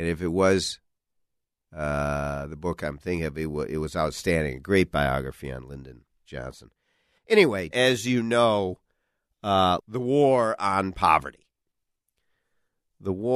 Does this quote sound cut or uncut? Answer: cut